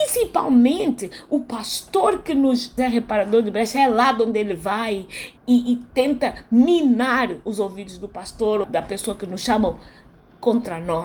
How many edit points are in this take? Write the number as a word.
three